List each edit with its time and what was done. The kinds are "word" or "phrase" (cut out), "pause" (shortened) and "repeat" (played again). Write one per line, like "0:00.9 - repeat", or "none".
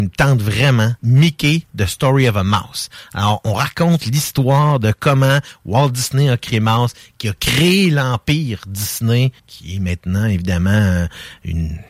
0:01.0 - word
0:06.5 - word
0:09.4 - pause